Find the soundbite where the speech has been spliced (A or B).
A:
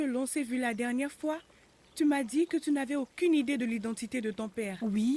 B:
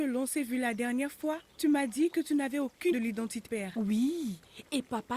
B